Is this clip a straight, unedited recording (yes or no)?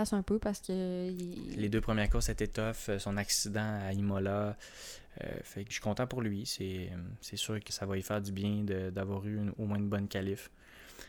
no